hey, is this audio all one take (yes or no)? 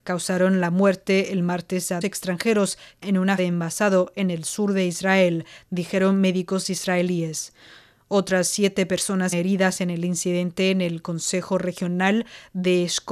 no